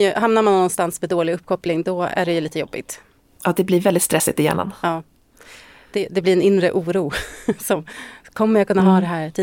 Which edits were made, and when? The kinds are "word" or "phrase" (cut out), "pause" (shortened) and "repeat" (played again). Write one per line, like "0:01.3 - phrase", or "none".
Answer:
none